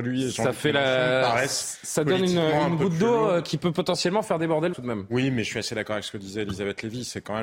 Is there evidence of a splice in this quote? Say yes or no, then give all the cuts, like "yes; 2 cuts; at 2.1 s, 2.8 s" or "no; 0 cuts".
yes; 1 cut; at 4.7 s